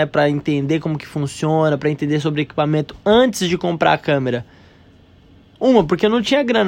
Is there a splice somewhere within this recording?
no; 0 cuts

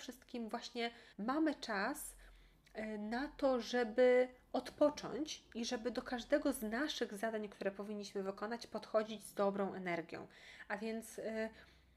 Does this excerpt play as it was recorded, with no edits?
no; 1 cut; at 1.1 s

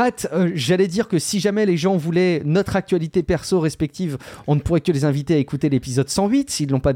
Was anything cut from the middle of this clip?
no; 0 cuts

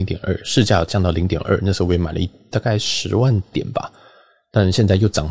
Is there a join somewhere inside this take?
no; 0 cuts

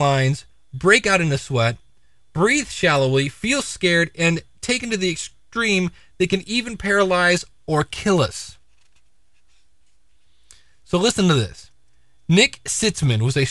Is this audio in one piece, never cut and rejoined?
yes; 0 cuts

